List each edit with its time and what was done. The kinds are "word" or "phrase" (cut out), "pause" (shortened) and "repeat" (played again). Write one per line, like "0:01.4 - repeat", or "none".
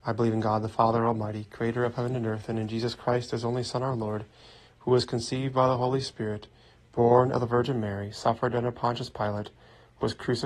none